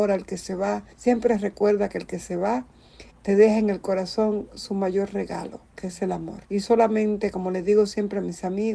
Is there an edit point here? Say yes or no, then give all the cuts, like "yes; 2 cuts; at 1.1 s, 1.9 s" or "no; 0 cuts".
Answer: yes; 3 cuts; at 0.9 s, 3.1 s, 6.4 s